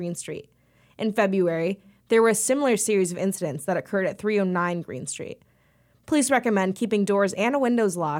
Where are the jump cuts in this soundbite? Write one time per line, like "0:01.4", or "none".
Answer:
none